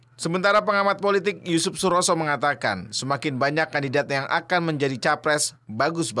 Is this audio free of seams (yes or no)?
yes